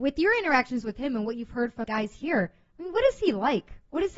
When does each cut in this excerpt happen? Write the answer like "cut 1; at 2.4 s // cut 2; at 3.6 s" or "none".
cut 1; at 1.8 s